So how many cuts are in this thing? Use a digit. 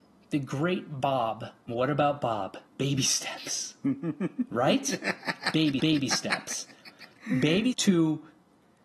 4